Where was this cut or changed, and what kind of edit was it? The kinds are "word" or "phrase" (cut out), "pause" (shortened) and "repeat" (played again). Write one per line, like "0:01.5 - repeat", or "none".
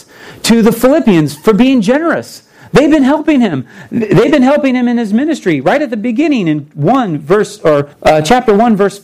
0:07.9 - pause